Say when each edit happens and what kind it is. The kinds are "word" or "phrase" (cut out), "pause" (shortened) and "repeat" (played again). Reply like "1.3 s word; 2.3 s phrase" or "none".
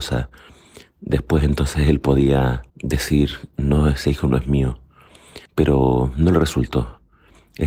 2.7 s pause; 5.5 s pause

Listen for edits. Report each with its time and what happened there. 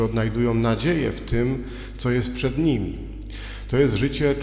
none

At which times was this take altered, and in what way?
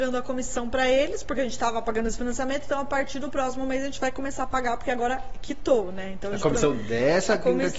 none

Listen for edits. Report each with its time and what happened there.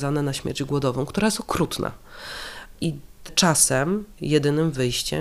3.3 s phrase

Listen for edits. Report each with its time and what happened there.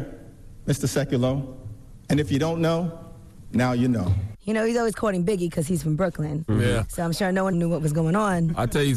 7.5 s phrase

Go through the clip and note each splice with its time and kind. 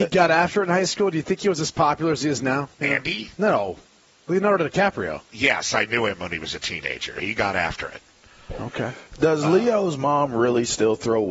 2.7 s pause; 3.3 s pause

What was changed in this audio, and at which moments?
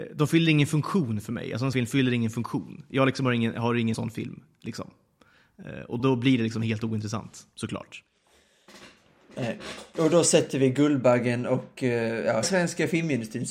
1.7 s word; 3.9 s phrase; 6.0 s word; 12.4 s phrase

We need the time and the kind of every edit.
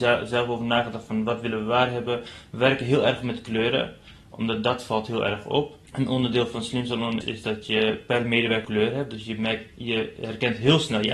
5.9 s pause; 7.2 s word; 8.6 s word

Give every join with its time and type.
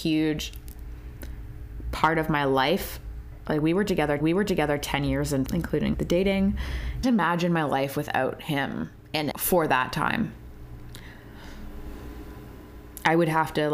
4.2 s repeat; 5.5 s word; 5.9 s word; 7.0 s phrase; 9.3 s word

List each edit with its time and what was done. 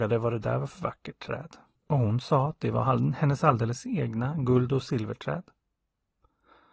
1.8 s pause

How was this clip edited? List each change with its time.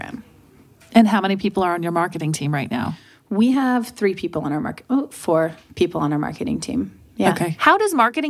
none

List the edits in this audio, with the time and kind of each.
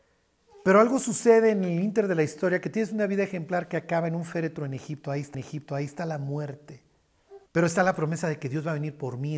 5.3 s repeat; 7.5 s pause

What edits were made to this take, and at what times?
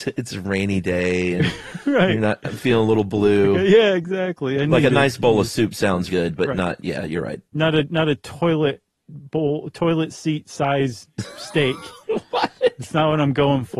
6.1 s word; 7.5 s pause

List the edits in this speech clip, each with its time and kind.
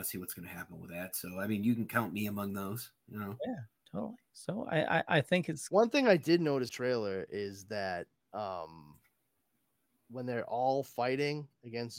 6.7 s phrase

